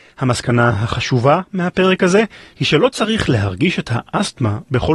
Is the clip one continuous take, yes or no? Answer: yes